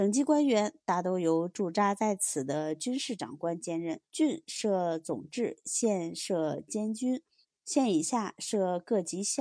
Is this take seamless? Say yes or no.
no